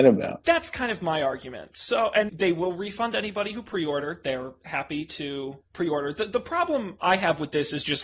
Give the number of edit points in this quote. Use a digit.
2